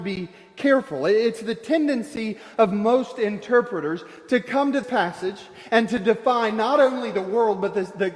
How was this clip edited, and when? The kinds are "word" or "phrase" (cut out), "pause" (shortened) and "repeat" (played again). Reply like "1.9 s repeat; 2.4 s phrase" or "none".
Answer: 4.8 s word